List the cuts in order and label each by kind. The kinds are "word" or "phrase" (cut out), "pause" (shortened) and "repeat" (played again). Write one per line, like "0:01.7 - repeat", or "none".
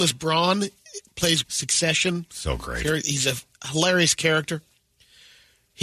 0:01.4 - phrase